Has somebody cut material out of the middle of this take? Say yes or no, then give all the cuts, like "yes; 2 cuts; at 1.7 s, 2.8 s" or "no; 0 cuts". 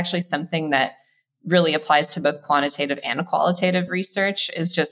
no; 0 cuts